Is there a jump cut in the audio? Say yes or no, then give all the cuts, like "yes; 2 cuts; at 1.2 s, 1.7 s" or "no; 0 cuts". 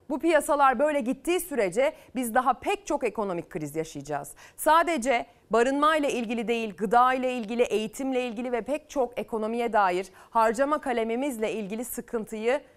no; 0 cuts